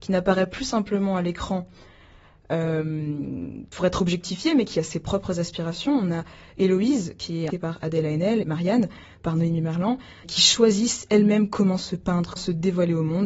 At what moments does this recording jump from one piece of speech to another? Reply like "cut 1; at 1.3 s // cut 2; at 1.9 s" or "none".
cut 1; at 7.5 s // cut 2; at 8.4 s // cut 3; at 10.2 s // cut 4; at 12.4 s